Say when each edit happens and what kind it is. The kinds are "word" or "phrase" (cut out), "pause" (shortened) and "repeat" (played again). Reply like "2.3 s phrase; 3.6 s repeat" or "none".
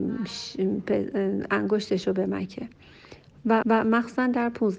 3.6 s repeat